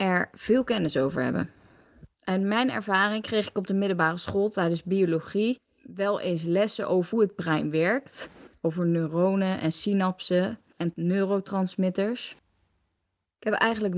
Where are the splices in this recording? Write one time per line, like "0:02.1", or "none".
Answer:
0:07.1